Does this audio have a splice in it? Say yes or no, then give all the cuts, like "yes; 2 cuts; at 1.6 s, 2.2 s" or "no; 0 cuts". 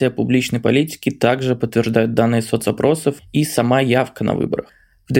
no; 0 cuts